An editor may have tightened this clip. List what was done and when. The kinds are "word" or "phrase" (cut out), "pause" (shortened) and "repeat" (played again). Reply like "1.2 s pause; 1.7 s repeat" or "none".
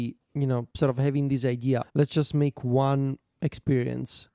1.8 s word

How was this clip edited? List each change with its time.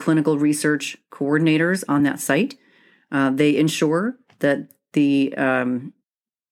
none

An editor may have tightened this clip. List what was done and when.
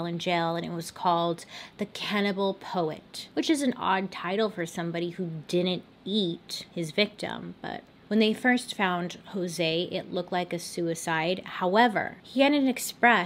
none

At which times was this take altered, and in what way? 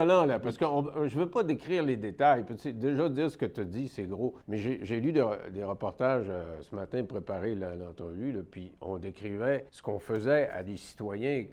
4.4 s pause; 9.7 s pause

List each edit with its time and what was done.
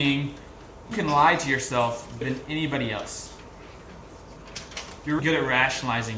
0.9 s word; 2.2 s word; 5.2 s word

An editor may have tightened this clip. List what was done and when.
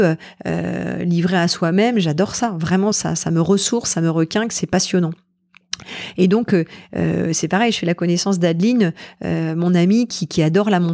2.9 s word

